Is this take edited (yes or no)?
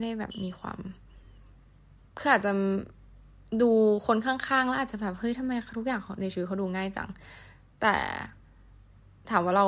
no